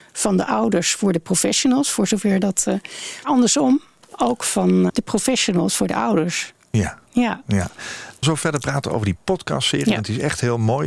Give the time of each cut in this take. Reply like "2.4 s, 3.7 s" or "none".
3.2 s, 4.9 s, 8.2 s